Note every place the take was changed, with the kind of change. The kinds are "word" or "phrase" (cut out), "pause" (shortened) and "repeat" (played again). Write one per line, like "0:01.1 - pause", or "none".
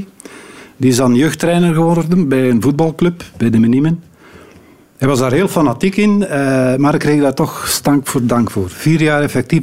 none